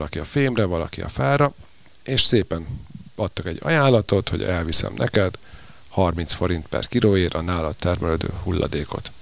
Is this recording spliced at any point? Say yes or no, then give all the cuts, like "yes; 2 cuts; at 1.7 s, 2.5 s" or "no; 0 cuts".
no; 0 cuts